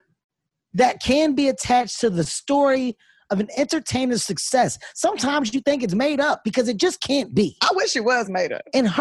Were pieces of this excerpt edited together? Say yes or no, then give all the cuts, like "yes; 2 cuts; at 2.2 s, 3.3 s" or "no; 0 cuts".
no; 0 cuts